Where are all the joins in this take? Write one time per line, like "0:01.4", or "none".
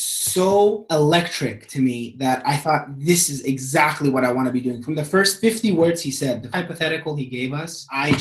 0:06.5

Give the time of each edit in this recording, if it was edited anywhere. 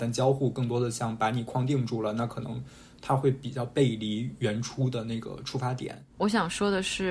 0:06.1

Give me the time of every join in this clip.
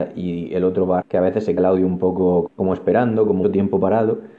0:01.0
0:01.6
0:02.5
0:03.4

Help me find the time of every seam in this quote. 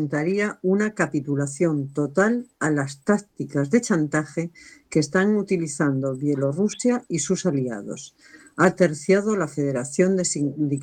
none

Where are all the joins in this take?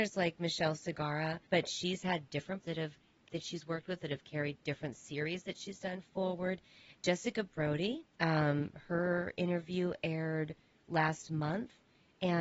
0:01.5
0:02.6
0:03.3
0:08.1

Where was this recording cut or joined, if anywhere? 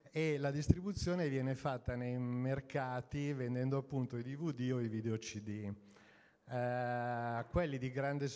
none

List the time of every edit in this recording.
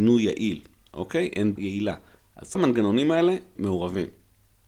0:01.6
0:02.5
0:03.6

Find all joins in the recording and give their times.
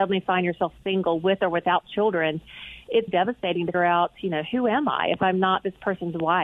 0:03.1
0:03.7

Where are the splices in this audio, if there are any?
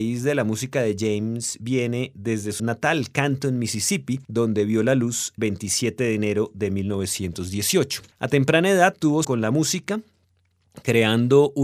0:02.6
0:04.2
0:05.4
0:08.1
0:09.2

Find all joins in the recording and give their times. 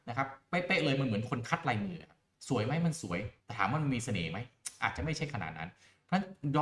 0:03.4

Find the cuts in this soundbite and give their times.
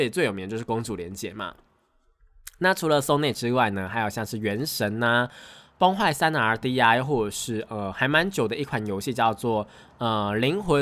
none

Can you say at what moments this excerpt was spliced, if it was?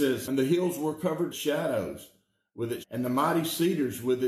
0:01.3
0:02.8

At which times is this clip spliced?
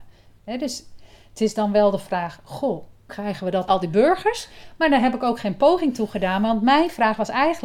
0:03.1
0:03.7

